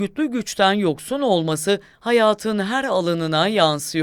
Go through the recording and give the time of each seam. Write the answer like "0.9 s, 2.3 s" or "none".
none